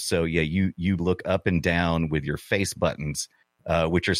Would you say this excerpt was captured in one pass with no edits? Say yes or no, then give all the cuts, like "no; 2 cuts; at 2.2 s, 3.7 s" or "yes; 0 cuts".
no; 1 cut; at 1.0 s